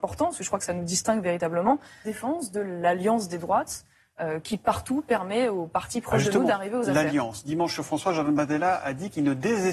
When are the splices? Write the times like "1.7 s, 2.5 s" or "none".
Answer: 2.0 s